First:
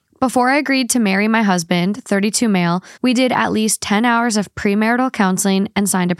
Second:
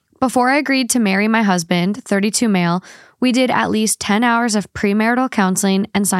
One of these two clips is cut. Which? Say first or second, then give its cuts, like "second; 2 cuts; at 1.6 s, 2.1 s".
first; 1 cut; at 3.0 s